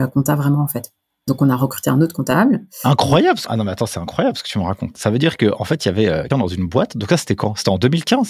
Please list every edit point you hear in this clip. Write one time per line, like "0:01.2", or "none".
0:03.5
0:06.3